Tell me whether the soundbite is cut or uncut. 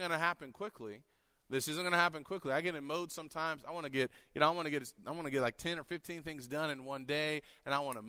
uncut